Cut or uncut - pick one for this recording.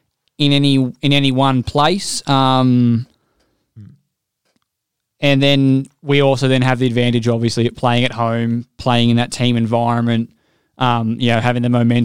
uncut